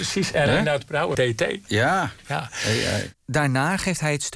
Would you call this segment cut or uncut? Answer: cut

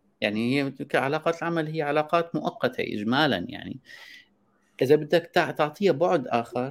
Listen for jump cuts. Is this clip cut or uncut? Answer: uncut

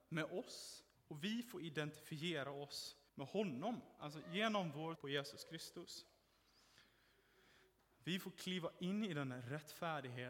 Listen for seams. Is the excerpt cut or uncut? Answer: cut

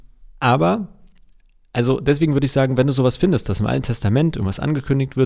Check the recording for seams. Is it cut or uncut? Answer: uncut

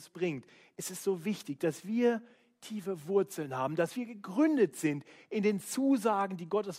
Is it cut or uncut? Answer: uncut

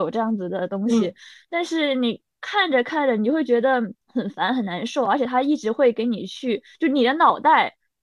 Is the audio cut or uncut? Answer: cut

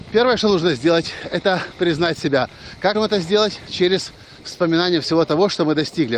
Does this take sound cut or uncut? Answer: cut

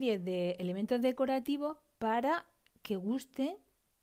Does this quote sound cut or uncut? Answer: uncut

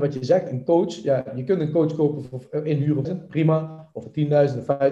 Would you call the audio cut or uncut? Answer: cut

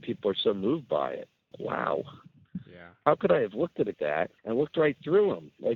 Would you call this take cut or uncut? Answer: cut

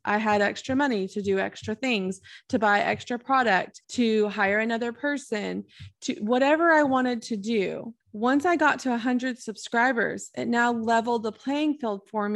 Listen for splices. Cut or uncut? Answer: cut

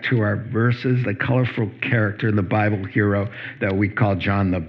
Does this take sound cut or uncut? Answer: cut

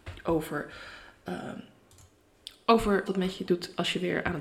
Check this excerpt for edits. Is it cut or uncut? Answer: cut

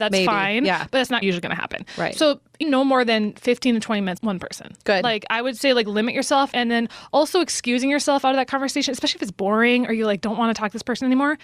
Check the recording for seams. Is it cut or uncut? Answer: cut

